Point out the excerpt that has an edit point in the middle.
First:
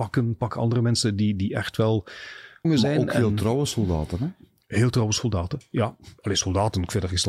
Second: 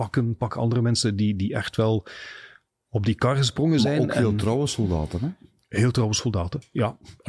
first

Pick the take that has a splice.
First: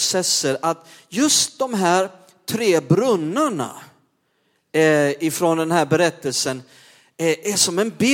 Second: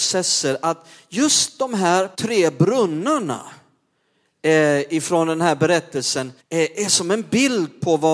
second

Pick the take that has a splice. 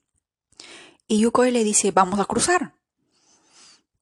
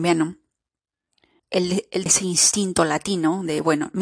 second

